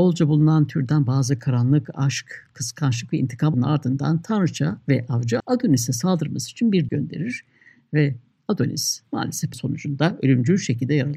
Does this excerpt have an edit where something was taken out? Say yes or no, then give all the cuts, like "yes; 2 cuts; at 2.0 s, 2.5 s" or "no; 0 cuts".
yes; 4 cuts; at 3.5 s, 5.4 s, 6.9 s, 9.5 s